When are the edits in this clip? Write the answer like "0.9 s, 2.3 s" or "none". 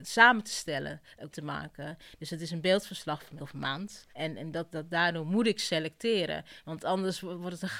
1.3 s, 3.4 s, 4.1 s, 4.7 s